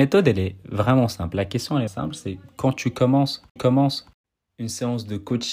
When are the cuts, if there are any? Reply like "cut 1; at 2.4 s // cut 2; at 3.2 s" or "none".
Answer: cut 1; at 1.9 s // cut 2; at 3.6 s